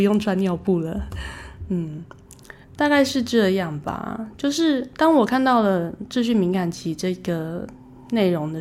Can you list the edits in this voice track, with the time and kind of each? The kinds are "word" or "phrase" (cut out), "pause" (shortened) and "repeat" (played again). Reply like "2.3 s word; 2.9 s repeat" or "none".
2.6 s pause